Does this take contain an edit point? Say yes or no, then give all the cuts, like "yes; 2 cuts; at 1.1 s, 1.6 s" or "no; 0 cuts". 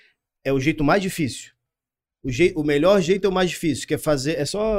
no; 0 cuts